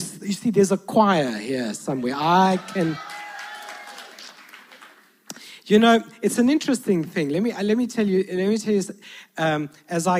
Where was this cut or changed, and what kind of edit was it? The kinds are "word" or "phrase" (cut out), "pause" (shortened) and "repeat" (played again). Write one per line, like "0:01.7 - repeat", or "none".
none